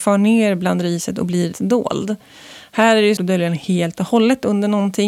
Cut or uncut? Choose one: cut